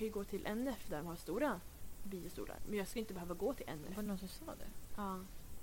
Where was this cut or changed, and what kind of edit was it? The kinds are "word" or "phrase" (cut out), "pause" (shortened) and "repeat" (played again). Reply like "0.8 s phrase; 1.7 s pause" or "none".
none